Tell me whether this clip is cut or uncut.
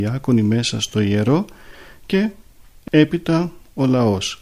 uncut